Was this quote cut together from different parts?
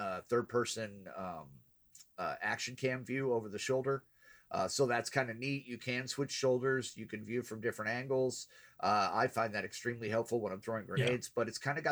no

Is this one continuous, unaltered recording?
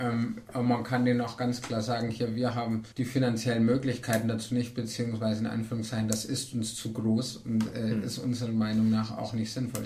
no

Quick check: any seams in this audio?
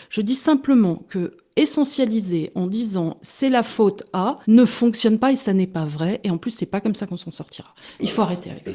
yes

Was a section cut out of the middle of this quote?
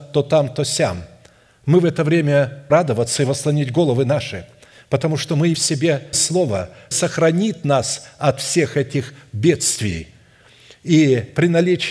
yes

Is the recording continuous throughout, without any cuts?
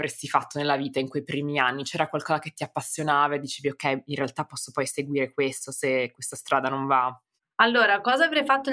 yes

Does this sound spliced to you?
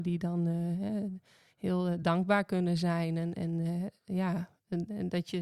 no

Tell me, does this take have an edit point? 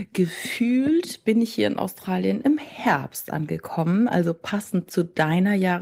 no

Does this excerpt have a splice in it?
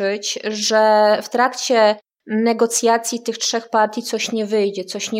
no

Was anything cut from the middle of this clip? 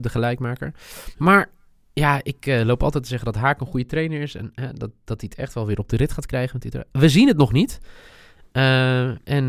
no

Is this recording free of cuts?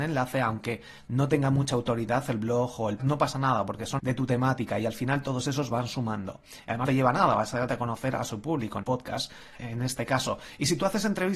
no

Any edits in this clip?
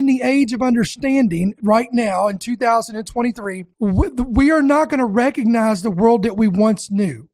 yes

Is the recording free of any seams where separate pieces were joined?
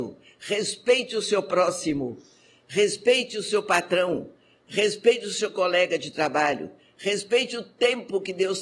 yes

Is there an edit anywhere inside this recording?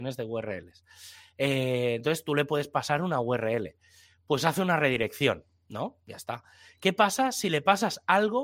no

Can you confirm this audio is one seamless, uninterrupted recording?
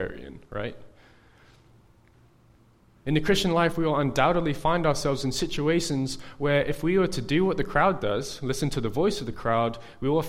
yes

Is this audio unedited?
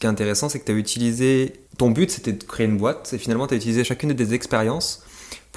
no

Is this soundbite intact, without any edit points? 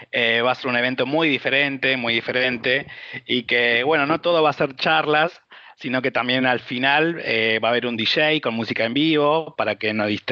yes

